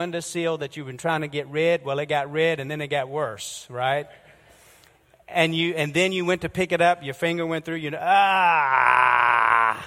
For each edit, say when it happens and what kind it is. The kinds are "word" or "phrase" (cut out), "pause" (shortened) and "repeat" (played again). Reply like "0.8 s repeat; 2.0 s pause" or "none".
none